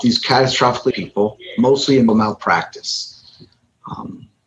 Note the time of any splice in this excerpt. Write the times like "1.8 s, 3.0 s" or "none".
0.9 s, 2.1 s